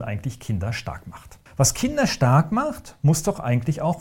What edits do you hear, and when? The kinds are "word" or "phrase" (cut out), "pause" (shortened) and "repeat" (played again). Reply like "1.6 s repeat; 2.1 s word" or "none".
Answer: 1.5 s pause